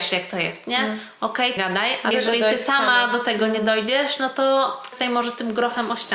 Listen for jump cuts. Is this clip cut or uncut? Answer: cut